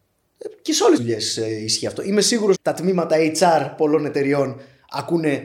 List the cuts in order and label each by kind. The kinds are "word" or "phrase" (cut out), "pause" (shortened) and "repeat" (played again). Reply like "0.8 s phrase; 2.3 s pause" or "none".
1.0 s word; 2.5 s word